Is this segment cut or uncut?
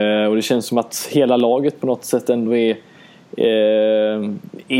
uncut